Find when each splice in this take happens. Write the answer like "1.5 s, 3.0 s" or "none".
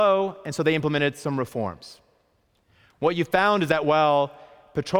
none